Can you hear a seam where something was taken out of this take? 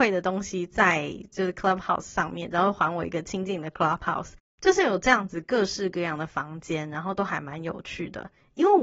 no; 0 cuts

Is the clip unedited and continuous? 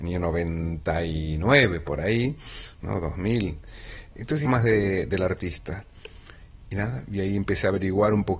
no; 1 cut; at 4.4 s

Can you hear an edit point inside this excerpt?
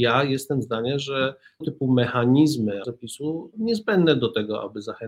yes; 3 cuts; at 1.6 s, 2.8 s, 3.5 s

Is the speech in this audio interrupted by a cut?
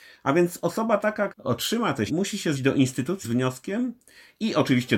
yes; 4 cuts; at 1.3 s, 2.1 s, 2.5 s, 3.2 s

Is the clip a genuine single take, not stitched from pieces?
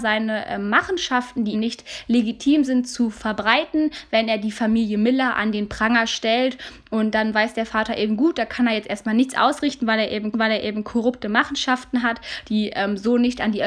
no; 2 cuts; at 1.5 s, 10.3 s

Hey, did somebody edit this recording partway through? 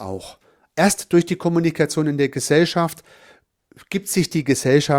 no; 0 cuts

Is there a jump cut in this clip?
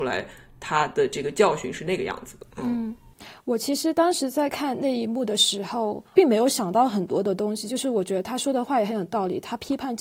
yes; 2 cuts; at 2.5 s, 6.1 s

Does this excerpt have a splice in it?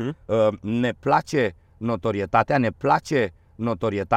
yes; 1 cut; at 2.7 s

